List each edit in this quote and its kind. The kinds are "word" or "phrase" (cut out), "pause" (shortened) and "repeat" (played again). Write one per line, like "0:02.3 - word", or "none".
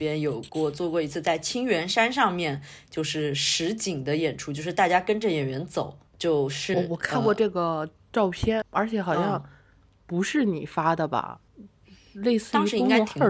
0:06.1 - pause
0:06.7 - word
0:08.6 - word
0:11.5 - pause